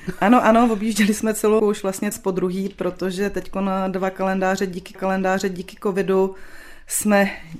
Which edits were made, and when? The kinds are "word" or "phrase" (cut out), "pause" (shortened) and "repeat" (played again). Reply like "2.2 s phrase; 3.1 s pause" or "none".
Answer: 1.6 s word; 2.1 s word; 4.9 s repeat